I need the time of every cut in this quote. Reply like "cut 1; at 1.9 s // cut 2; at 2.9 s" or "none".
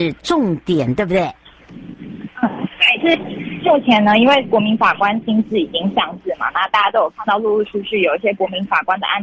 cut 1; at 3.0 s